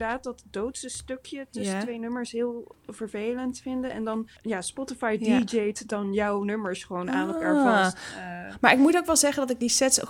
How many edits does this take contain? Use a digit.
2